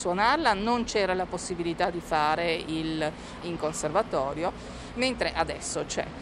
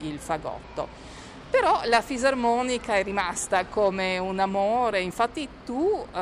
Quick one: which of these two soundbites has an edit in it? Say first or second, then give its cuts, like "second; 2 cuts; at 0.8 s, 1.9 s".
first; 1 cut; at 3.4 s